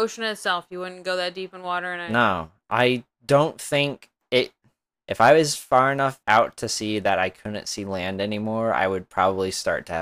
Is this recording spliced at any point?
yes; 3 cuts; at 3.1 s, 4.9 s, 6.2 s

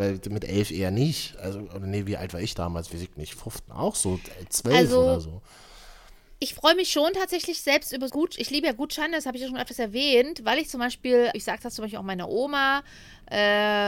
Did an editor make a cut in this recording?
yes; 3 cuts; at 3.7 s, 8.1 s, 11.3 s

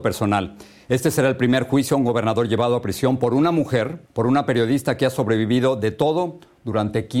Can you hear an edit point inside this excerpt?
yes; 1 cut; at 4.1 s

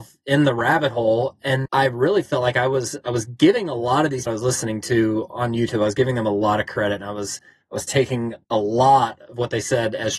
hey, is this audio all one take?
no; 3 cuts; at 1.7 s, 4.3 s, 8.4 s

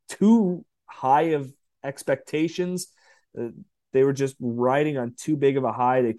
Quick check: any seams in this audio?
no; 0 cuts

